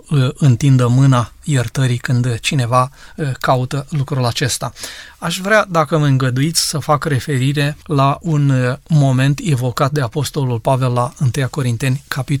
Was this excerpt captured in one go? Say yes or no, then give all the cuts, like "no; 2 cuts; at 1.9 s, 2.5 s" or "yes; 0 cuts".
no; 1 cut; at 7.8 s